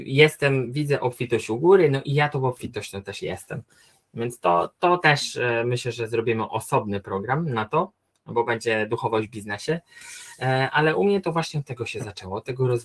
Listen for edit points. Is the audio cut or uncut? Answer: uncut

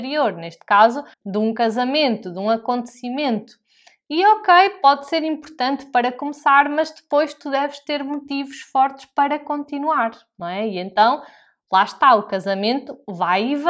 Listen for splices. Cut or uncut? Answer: cut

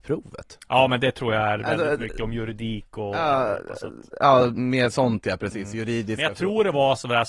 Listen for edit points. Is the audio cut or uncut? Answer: uncut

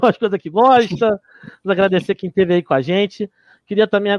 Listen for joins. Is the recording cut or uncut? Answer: uncut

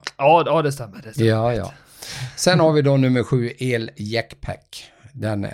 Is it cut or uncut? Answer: uncut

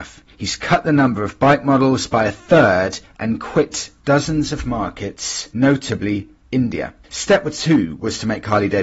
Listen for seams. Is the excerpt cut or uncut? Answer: cut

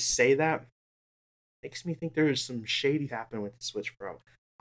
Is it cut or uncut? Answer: cut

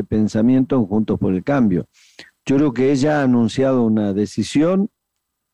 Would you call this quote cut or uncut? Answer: uncut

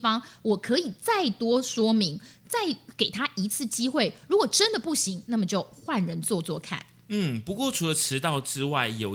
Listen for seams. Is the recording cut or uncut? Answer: uncut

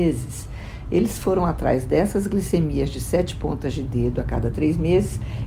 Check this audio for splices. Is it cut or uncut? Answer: uncut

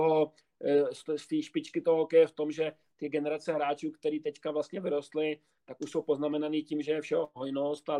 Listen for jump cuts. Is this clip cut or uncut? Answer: uncut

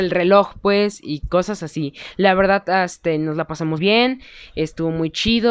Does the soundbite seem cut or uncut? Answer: cut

